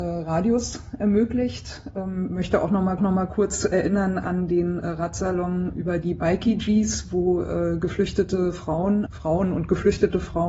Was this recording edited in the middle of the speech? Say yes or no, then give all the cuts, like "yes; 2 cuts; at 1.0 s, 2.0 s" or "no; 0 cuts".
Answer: yes; 2 cuts; at 3.0 s, 9.1 s